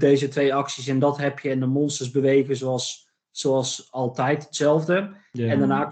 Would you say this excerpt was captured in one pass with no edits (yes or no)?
yes